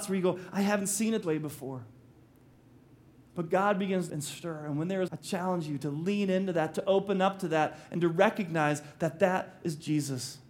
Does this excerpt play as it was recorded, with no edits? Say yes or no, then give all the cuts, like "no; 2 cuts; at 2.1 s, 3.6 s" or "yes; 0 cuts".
no; 3 cuts; at 1.2 s, 4.1 s, 5.1 s